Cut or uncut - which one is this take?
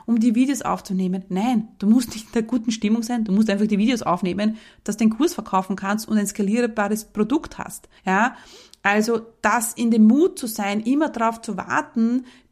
cut